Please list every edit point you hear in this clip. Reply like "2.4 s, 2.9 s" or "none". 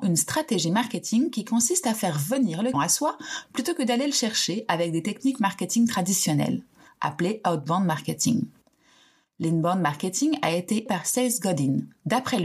2.7 s, 10.9 s